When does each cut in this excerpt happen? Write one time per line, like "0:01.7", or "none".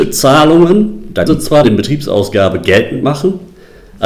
0:01.3
0:01.6